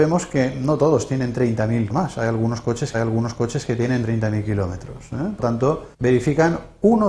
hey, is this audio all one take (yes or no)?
no